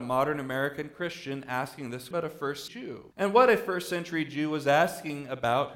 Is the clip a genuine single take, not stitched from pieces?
no; 3 cuts; at 2.1 s, 2.7 s, 3.1 s

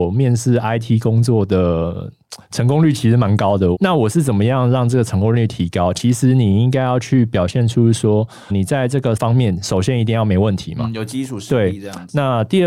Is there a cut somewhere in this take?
yes; 2 cuts; at 8.5 s, 9.2 s

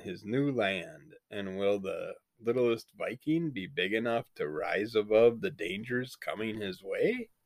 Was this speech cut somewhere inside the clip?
no; 0 cuts

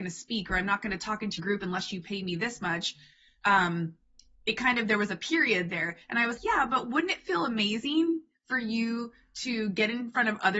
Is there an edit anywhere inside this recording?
yes; 2 cuts; at 1.4 s, 6.4 s

